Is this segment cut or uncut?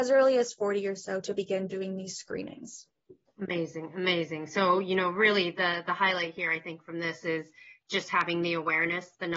uncut